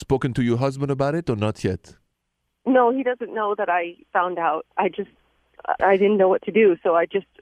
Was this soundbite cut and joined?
yes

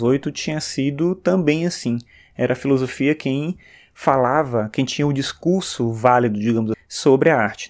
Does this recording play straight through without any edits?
no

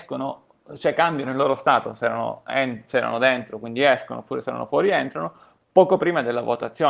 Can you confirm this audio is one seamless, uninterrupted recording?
yes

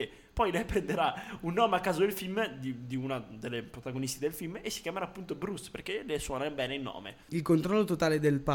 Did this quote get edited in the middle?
yes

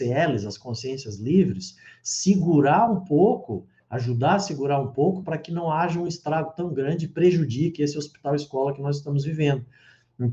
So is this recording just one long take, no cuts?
yes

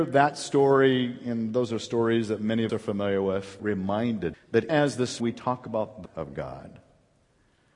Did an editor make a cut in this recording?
yes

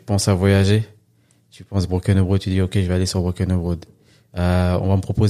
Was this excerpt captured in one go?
yes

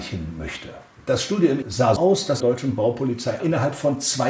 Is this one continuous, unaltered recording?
no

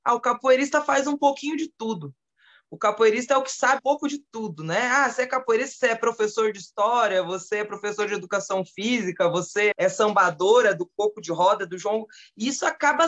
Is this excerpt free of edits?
no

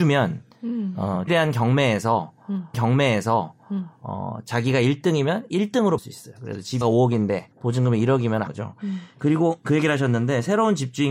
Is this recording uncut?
no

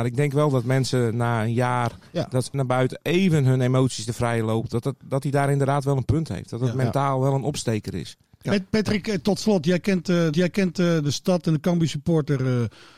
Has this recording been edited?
yes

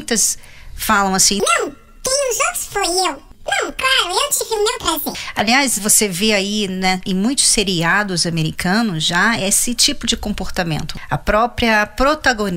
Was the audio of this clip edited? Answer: no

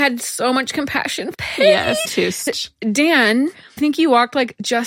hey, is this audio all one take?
no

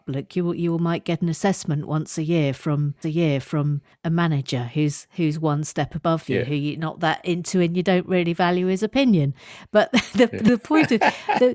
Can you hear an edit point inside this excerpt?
yes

